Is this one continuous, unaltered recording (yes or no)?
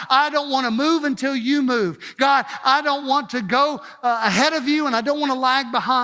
yes